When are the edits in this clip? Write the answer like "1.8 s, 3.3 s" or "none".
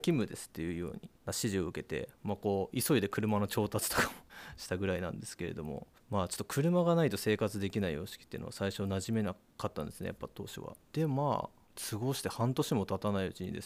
1.2 s, 10.8 s